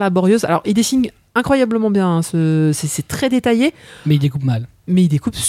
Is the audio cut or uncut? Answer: uncut